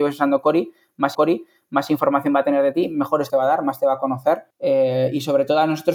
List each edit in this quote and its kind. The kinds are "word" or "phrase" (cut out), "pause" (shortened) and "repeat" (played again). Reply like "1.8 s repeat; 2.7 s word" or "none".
1.1 s repeat; 3.3 s word; 4.5 s pause